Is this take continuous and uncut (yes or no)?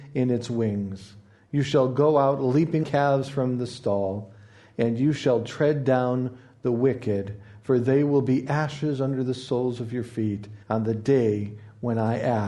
no